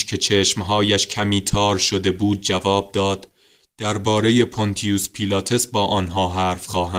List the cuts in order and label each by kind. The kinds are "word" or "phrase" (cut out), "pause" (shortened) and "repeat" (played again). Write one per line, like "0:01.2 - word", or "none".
none